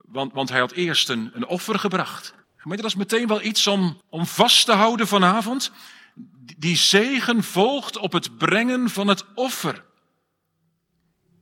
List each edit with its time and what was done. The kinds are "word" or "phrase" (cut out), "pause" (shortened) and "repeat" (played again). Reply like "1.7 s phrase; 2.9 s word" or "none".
2.4 s pause; 4.0 s pause